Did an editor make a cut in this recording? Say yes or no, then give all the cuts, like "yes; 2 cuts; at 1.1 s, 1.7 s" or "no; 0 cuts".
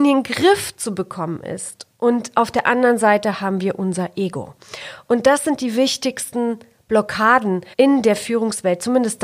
yes; 1 cut; at 7.7 s